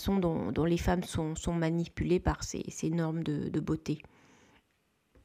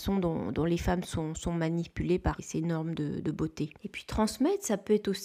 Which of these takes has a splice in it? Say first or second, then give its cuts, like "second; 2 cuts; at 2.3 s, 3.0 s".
second; 2 cuts; at 2.4 s, 3.8 s